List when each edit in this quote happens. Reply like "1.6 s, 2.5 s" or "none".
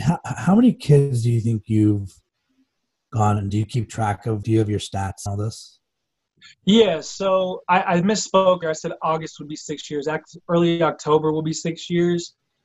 3.5 s, 4.4 s, 5.3 s, 7.6 s, 8.6 s, 10.4 s

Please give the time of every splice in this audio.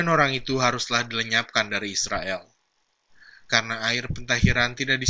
none

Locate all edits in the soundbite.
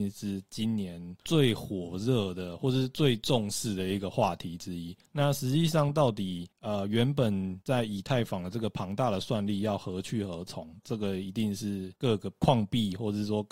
5.1 s, 6.5 s, 7.6 s, 12.0 s

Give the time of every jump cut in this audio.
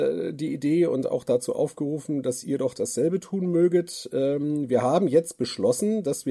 none

